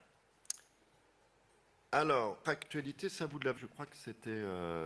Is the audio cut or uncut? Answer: cut